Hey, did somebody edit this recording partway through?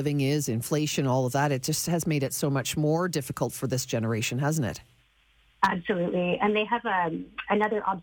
no; 0 cuts

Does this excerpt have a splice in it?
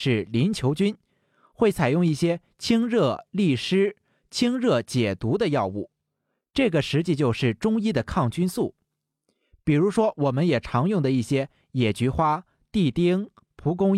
no; 0 cuts

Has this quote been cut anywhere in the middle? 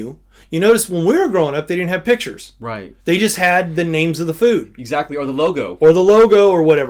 yes; 1 cut; at 3.0 s

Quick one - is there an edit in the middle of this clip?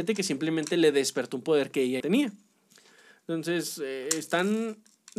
yes; 1 cut; at 2.0 s

